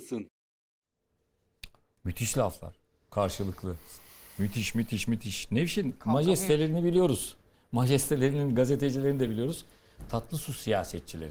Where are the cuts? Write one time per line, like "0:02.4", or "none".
none